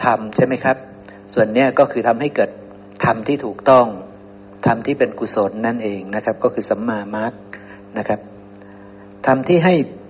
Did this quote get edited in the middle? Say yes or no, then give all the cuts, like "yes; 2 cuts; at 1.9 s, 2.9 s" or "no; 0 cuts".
no; 0 cuts